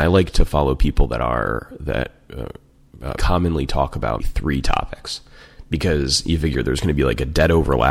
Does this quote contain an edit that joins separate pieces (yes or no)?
yes